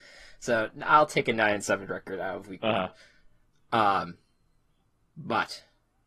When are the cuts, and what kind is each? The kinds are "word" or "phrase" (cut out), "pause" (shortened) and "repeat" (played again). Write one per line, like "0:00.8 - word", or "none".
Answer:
none